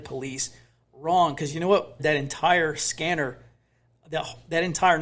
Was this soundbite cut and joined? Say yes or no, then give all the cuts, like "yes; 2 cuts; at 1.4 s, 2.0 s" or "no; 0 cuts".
yes; 1 cut; at 2.0 s